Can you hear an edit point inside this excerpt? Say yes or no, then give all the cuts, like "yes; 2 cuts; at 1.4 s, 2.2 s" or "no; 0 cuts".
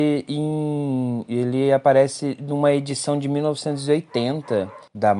no; 0 cuts